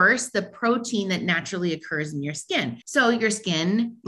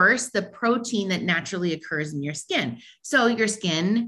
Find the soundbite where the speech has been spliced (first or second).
first